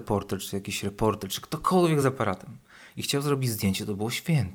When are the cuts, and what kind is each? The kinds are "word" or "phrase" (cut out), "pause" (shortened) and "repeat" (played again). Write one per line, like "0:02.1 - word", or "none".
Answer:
none